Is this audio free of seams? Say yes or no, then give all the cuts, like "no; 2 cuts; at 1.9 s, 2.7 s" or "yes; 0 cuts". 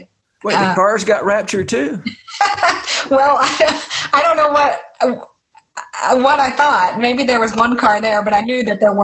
yes; 0 cuts